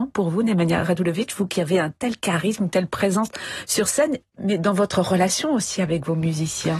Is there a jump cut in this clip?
no; 0 cuts

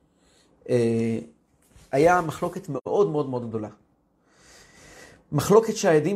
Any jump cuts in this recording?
no; 0 cuts

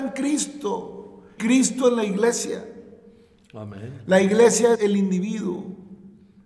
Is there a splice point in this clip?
yes; 2 cuts; at 1.4 s, 4.7 s

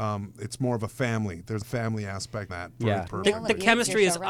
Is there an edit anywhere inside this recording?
yes; 3 cuts; at 1.6 s, 2.5 s, 3.1 s

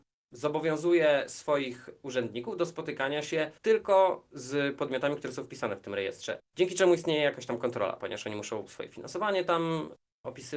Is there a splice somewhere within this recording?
yes; 2 cuts; at 3.6 s, 6.4 s

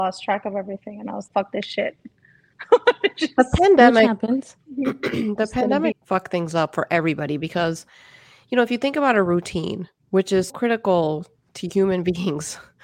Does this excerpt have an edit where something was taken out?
yes; 3 cuts; at 1.3 s, 5.9 s, 10.5 s

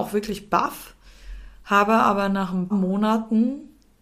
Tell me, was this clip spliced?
yes; 1 cut; at 2.7 s

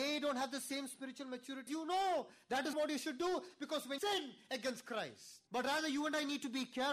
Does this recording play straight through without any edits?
no; 4 cuts; at 1.7 s, 2.7 s, 4.0 s, 5.5 s

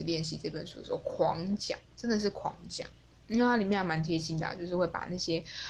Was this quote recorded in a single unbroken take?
yes; 0 cuts

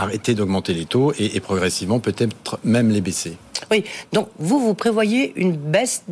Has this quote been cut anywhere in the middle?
no; 0 cuts

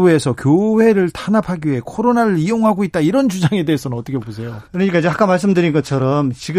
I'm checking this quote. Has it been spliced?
yes; 1 cut; at 4.6 s

